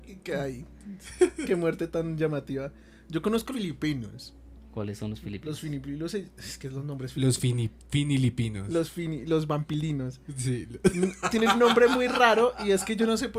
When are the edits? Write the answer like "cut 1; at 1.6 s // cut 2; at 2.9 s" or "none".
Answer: cut 1; at 3.5 s